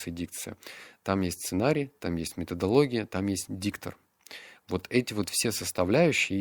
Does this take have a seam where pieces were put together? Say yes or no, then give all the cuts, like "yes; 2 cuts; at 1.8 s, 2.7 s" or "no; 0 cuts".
no; 0 cuts